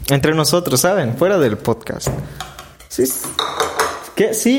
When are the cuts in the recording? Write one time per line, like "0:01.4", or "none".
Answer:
none